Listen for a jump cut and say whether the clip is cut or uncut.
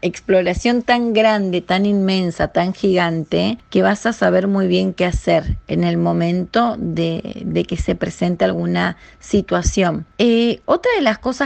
uncut